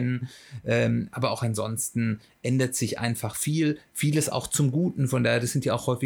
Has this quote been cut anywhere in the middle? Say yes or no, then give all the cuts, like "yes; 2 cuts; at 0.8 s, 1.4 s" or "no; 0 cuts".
no; 0 cuts